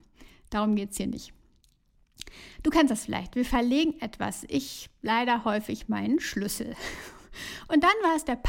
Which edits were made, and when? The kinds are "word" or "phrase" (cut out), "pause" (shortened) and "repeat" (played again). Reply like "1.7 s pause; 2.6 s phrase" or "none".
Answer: none

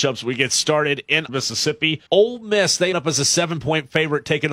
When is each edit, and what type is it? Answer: 1.3 s word; 2.1 s pause; 2.9 s word

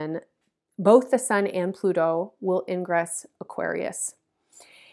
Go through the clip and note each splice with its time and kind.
none

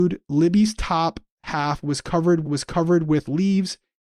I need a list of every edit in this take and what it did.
2.4 s repeat

